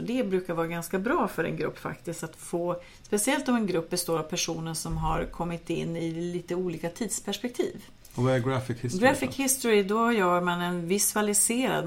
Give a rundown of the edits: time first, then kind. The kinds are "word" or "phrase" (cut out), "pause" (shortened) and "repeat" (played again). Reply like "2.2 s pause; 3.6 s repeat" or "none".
none